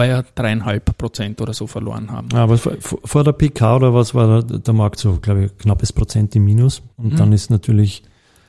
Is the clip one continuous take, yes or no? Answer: no